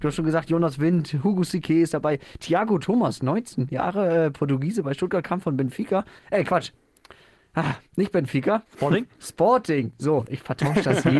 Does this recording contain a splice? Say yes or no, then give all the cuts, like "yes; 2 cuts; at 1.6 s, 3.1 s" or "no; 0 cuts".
yes; 3 cuts; at 6.2 s, 7.9 s, 8.7 s